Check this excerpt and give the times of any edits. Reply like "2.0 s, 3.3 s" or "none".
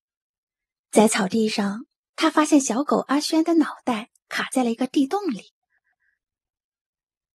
none